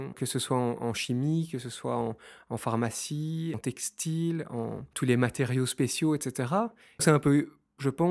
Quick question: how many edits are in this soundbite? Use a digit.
1